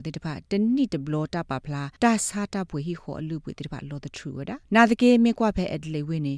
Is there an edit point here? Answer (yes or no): yes